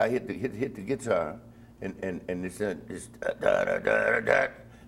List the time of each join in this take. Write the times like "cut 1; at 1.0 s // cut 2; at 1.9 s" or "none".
cut 1; at 2.0 s